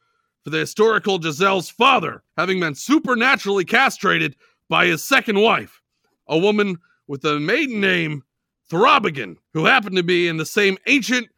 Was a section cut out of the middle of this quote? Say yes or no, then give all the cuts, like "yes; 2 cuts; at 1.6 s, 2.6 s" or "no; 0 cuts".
yes; 2 cuts; at 2.3 s, 9.4 s